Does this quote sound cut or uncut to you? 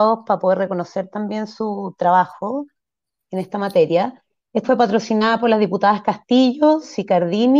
cut